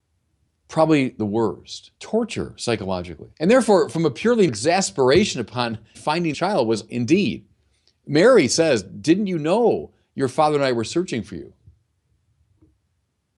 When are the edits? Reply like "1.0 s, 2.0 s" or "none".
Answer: 1.2 s, 1.9 s, 3.3 s, 4.5 s, 5.9 s, 6.3 s, 6.9 s